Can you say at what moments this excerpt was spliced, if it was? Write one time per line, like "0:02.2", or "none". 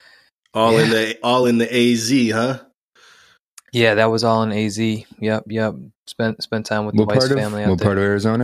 none

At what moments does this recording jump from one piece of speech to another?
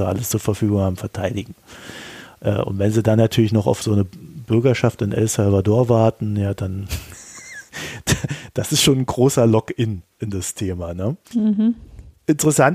0:11.2

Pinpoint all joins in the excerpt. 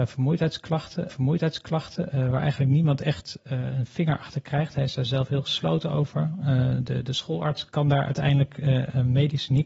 0:01.1

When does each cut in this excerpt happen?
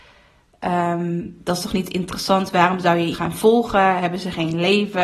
0:03.1

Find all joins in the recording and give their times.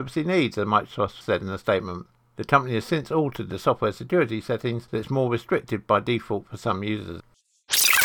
0:01.2

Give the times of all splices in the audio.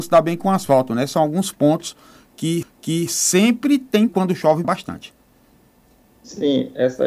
0:02.6
0:04.1
0:04.6

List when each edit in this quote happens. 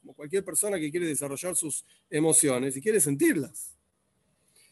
none

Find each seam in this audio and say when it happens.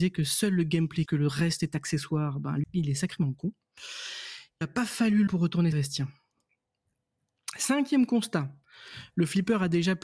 0:01.1
0:02.6
0:04.6
0:05.3
0:05.7

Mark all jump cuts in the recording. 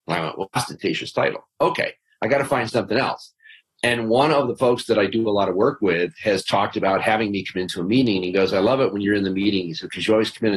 none

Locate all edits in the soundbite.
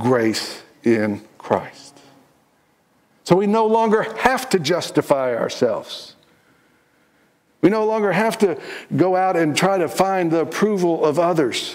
none

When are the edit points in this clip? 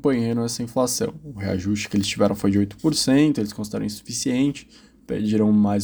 none

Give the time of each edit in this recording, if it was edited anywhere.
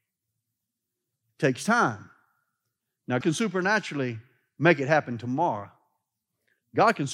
0:03.2

